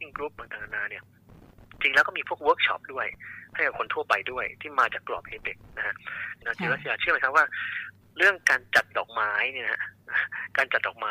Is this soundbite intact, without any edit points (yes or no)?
yes